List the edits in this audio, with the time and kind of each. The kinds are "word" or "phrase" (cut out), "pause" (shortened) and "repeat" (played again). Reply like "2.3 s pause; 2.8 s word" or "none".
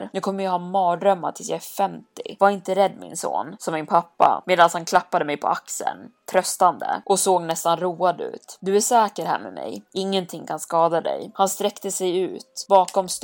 9.9 s pause